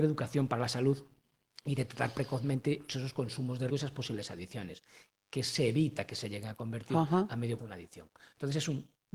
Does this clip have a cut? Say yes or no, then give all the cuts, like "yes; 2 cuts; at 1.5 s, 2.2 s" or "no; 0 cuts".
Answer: yes; 3 cuts; at 2.9 s, 3.7 s, 7.6 s